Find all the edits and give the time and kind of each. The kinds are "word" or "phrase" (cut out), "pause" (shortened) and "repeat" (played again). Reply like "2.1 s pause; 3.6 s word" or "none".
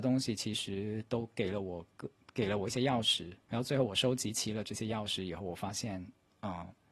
3.4 s pause